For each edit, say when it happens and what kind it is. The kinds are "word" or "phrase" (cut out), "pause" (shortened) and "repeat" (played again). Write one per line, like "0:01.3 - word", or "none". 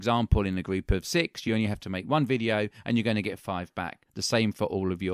none